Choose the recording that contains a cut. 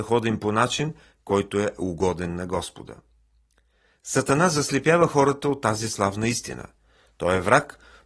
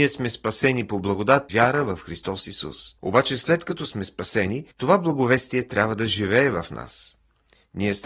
second; 3 cuts; at 1.5 s, 3.0 s, 4.7 s

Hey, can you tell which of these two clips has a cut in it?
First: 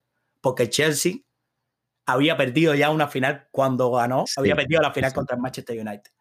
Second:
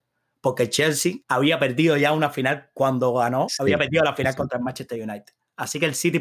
second; 1 cut; at 1.2 s

